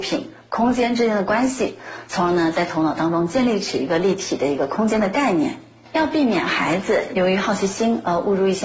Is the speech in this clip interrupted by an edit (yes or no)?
no